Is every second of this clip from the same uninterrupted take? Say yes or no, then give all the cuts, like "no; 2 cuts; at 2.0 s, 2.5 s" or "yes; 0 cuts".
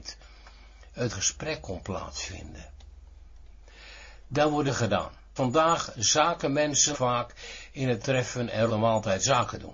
no; 6 cuts; at 1.1 s, 4.7 s, 5.4 s, 6.9 s, 8.0 s, 8.7 s